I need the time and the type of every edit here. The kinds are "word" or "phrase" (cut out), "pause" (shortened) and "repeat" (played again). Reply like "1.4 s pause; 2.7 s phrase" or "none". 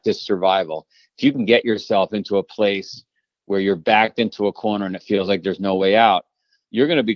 none